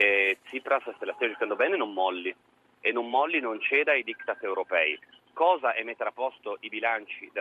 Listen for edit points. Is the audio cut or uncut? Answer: uncut